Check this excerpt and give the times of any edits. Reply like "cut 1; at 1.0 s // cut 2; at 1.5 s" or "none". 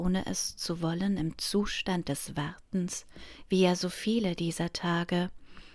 none